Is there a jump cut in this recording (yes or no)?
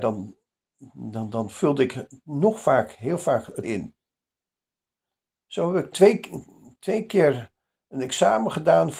yes